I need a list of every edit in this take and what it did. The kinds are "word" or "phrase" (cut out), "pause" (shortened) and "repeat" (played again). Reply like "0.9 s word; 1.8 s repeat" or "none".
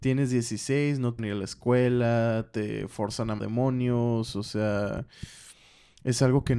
1.2 s word; 3.4 s word